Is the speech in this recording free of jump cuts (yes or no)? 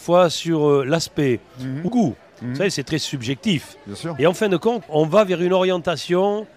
no